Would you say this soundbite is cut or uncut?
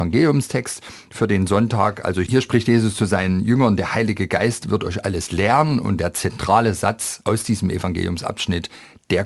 uncut